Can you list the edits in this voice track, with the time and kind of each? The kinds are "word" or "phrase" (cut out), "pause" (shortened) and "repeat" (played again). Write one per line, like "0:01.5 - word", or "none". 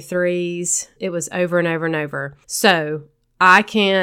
0:01.0 - word
0:02.4 - pause